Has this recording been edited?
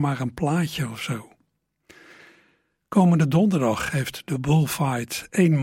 no; 0 cuts

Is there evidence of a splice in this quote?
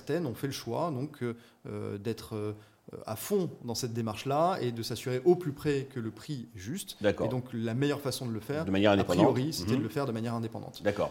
no; 0 cuts

